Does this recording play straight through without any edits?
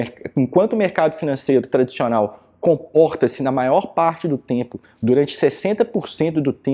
yes; 0 cuts

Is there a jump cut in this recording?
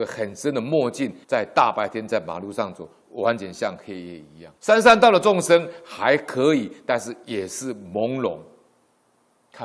yes; 2 cuts; at 1.2 s, 4.6 s

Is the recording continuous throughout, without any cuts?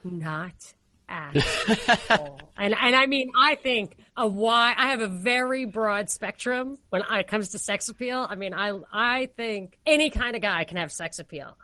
no; 3 cuts; at 4.1 s, 6.9 s, 9.8 s

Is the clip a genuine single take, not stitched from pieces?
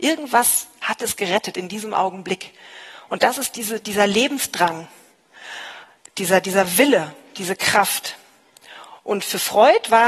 yes; 0 cuts

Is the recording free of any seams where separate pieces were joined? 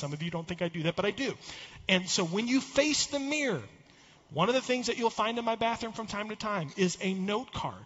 yes; 0 cuts

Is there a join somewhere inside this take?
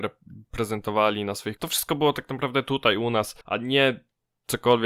yes; 2 cuts; at 1.6 s, 3.4 s

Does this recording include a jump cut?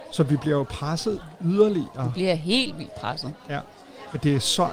no; 0 cuts

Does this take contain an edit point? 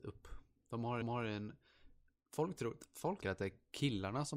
yes; 2 cuts; at 1.0 s, 3.2 s

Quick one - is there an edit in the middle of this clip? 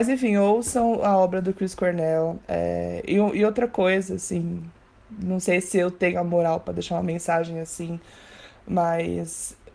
no; 0 cuts

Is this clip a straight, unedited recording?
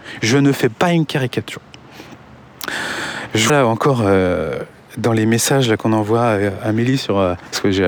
no; 1 cut; at 3.5 s

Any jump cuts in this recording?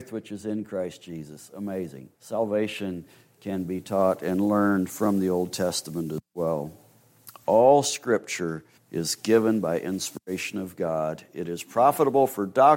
yes; 2 cuts; at 2.1 s, 8.8 s

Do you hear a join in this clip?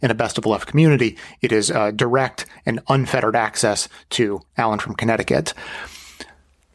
yes; 1 cut; at 4.5 s

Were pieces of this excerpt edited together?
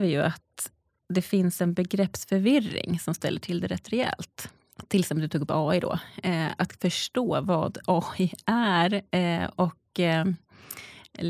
no; 0 cuts

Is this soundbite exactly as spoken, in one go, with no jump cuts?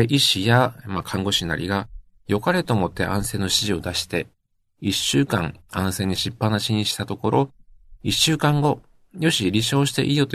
yes; 0 cuts

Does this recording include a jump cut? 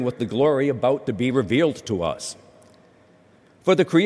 no; 0 cuts

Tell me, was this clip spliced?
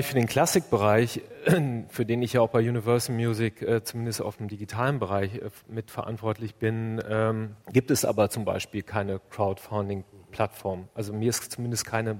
yes; 1 cut; at 7.6 s

